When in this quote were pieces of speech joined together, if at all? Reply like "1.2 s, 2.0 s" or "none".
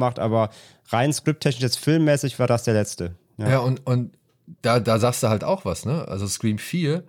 none

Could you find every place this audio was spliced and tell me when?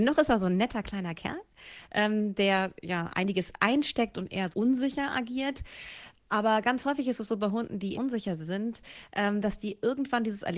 4.5 s, 7.9 s

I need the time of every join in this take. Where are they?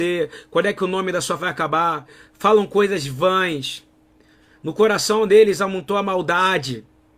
1.4 s

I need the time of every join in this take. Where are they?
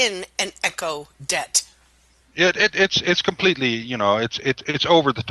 none

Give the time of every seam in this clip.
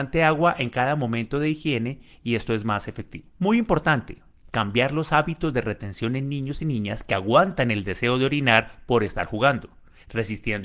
none

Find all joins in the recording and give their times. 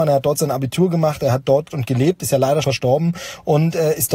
1.7 s, 2.6 s

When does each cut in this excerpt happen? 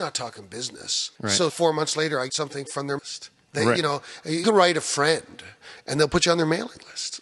1.2 s, 1.5 s, 2.3 s, 3.0 s, 4.4 s

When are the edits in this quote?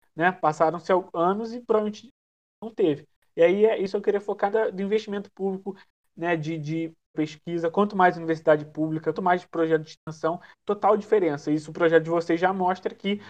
4.5 s, 7.1 s, 9.1 s, 10.5 s

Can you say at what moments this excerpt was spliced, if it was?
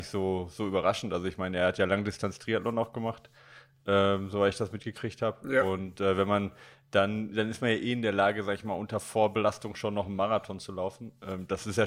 none

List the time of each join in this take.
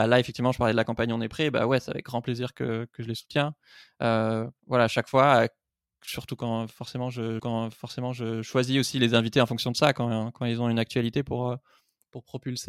4.6 s, 7.4 s

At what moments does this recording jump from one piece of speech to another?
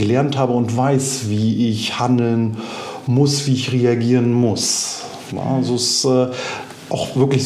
none

